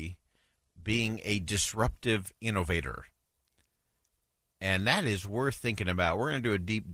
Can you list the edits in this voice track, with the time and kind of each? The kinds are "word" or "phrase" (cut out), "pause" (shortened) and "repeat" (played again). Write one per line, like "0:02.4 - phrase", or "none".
none